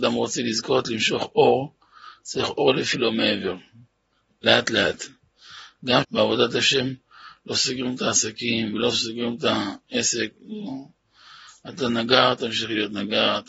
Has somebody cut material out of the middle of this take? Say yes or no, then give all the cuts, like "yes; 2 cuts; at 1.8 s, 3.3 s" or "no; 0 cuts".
yes; 2 cuts; at 2.9 s, 6.0 s